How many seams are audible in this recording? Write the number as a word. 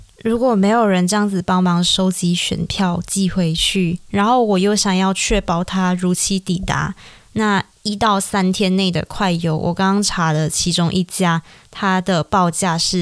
zero